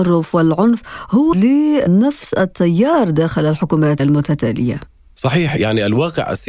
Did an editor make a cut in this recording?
yes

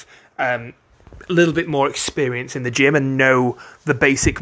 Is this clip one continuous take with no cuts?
yes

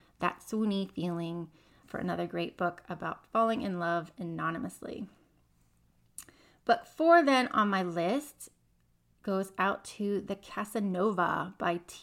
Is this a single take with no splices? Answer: yes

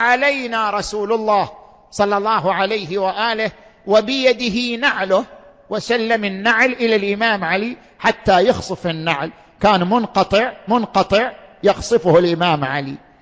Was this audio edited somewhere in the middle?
yes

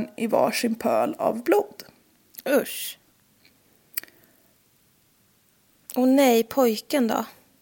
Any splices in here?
no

